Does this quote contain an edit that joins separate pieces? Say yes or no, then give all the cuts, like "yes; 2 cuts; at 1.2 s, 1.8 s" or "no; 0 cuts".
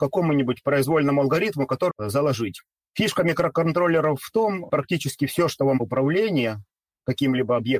yes; 3 cuts; at 1.9 s, 4.7 s, 5.8 s